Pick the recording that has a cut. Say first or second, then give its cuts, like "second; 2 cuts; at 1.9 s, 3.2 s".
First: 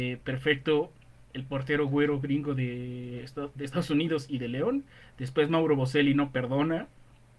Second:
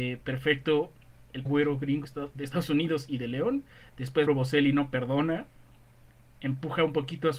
second; 3 cuts; at 1.5 s, 2.0 s, 4.3 s